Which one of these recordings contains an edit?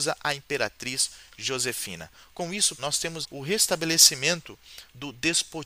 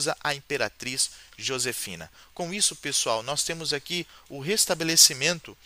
first; 2 cuts; at 2.8 s, 3.2 s

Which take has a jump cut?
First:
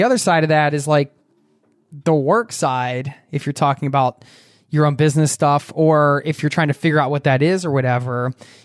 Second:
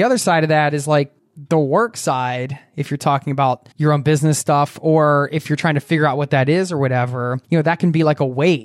second; 3 cuts; at 1.2 s, 3.7 s, 7.4 s

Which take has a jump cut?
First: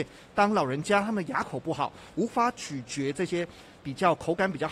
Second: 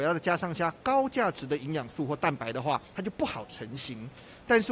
second; 1 cut; at 2.8 s

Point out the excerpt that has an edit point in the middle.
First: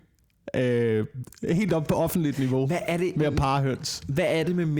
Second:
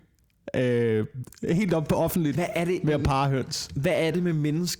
second; 1 cut; at 2.4 s

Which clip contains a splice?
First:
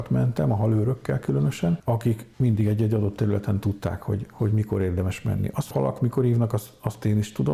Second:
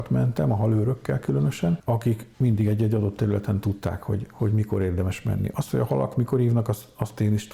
first; 1 cut; at 5.7 s

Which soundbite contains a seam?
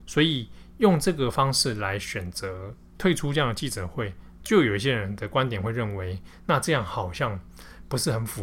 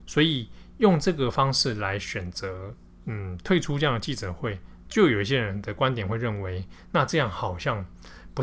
first; 1 cut; at 2.9 s

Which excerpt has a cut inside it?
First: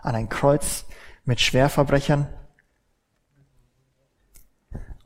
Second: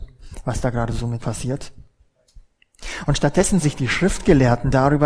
second; 2 cuts; at 1.2 s, 3.6 s

